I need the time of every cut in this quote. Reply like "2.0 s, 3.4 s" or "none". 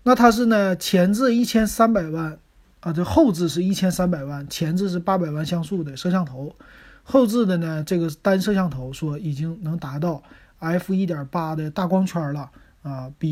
none